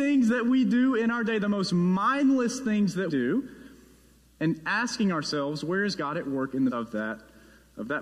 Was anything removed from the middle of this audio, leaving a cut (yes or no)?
yes